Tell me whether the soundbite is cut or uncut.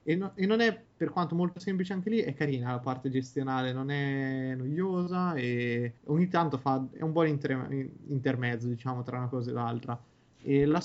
cut